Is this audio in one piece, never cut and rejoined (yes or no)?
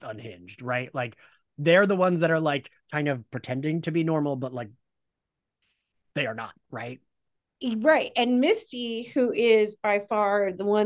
no